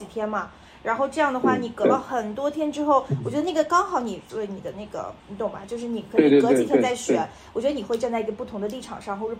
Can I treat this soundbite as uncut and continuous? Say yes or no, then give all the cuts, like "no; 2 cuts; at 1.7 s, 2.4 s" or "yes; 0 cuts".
no; 2 cuts; at 4.3 s, 5.2 s